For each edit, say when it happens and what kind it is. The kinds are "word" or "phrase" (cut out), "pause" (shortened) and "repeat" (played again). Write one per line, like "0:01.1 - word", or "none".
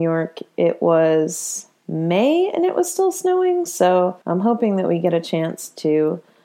0:04.2 - pause